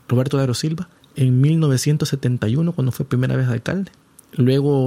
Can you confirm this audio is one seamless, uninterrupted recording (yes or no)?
no